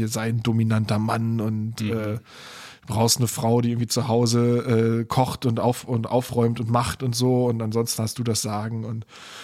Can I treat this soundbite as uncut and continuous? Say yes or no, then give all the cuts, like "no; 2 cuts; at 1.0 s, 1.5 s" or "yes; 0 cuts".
yes; 0 cuts